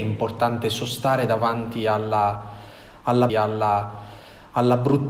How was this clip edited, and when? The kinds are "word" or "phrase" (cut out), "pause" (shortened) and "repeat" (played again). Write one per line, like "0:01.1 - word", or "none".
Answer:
0:03.3 - repeat